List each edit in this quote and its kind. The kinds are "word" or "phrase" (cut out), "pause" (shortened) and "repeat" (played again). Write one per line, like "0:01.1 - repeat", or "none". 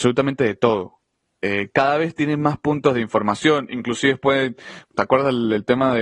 none